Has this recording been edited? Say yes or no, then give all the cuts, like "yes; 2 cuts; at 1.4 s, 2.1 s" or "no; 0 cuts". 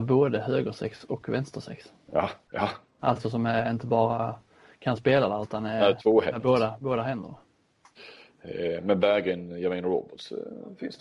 no; 0 cuts